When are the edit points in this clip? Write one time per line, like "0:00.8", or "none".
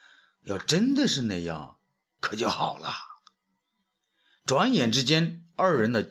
none